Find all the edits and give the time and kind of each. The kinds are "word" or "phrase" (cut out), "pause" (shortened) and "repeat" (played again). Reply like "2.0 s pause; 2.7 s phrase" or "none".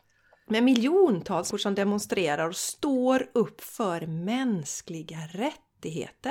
1.5 s word